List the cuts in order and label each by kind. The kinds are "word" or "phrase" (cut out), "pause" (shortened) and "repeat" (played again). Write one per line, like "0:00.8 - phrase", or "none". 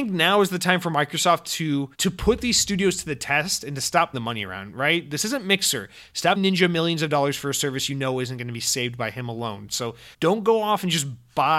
0:01.9 - pause
0:04.1 - word
0:06.4 - word
0:10.1 - pause